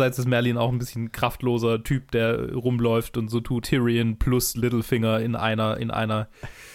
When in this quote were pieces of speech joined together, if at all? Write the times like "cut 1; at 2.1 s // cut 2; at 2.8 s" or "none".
cut 1; at 3.6 s